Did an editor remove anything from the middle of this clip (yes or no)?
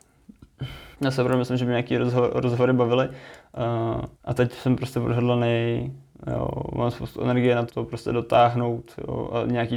yes